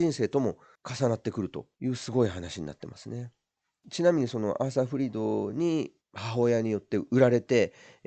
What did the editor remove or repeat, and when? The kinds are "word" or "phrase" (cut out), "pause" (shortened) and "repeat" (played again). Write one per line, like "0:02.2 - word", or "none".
0:06.0 - phrase